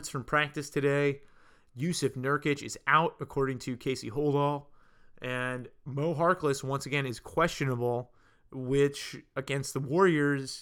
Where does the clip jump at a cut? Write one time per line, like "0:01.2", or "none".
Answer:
none